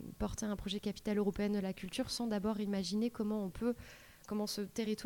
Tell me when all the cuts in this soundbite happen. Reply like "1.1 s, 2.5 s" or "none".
none